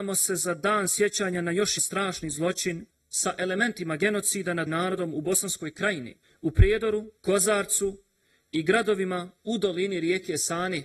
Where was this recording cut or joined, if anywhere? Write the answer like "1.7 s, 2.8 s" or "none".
1.8 s, 2.9 s, 4.7 s, 6.2 s, 7.2 s